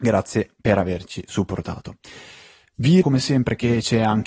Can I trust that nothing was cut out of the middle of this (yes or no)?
no